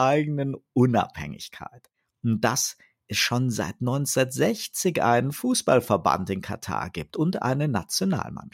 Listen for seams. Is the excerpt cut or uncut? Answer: uncut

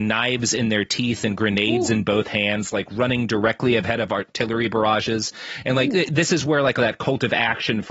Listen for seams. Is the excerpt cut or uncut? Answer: cut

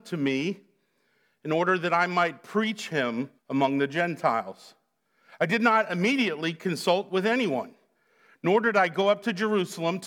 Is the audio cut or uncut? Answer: cut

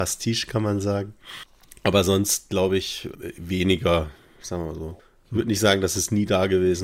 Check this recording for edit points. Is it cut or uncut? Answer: uncut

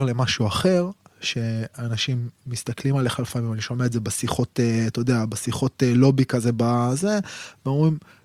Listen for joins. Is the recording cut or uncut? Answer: uncut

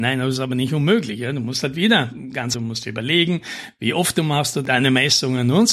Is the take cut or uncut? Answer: cut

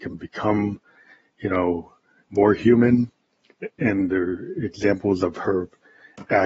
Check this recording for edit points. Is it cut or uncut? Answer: uncut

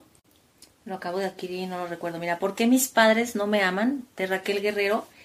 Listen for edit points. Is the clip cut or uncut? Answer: uncut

